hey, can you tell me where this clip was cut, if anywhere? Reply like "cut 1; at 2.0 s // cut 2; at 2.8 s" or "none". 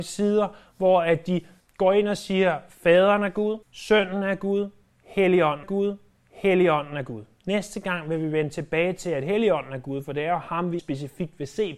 cut 1; at 1.6 s // cut 2; at 3.6 s // cut 3; at 5.6 s // cut 4; at 10.8 s